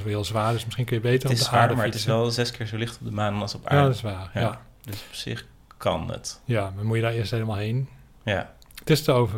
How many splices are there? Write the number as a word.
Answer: zero